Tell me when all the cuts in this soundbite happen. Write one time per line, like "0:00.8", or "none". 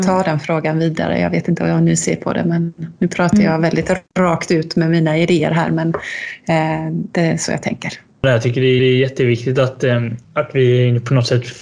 0:03.0
0:08.8
0:10.2